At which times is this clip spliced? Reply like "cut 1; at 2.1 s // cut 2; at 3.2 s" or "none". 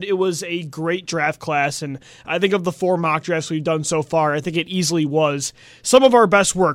none

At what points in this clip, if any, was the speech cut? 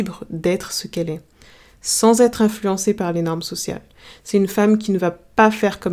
none

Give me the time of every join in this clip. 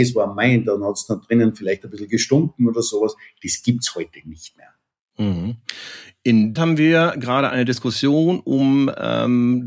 cut 1; at 6.6 s

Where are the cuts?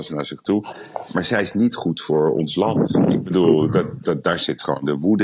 cut 1; at 4.0 s

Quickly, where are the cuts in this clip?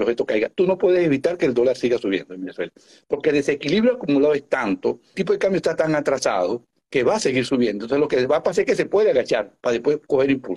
cut 1; at 5.1 s

